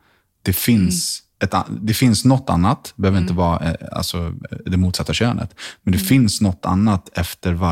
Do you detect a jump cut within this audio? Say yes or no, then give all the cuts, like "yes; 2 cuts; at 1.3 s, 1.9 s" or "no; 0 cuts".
yes; 1 cut; at 1.3 s